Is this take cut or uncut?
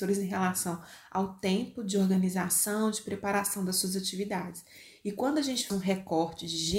cut